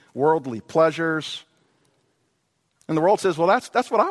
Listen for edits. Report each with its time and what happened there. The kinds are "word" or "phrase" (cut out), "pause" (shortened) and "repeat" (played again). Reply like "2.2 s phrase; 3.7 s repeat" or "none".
none